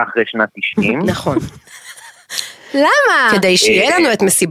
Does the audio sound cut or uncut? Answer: uncut